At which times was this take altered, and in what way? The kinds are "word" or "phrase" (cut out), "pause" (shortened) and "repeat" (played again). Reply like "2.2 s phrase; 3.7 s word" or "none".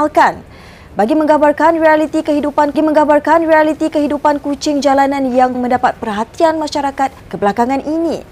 2.7 s repeat; 5.5 s word; 7.2 s pause